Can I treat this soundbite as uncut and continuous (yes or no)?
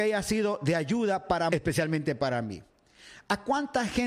no